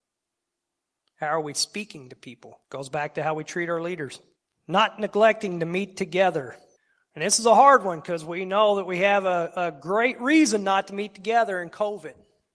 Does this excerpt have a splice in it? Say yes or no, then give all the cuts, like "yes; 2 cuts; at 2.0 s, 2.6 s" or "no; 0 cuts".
yes; 3 cuts; at 2.6 s, 4.4 s, 6.8 s